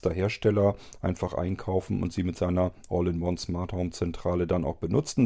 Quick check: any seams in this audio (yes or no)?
no